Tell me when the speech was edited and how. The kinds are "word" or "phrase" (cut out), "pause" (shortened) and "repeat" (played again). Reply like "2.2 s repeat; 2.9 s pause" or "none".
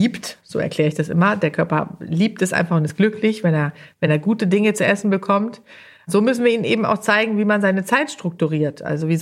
none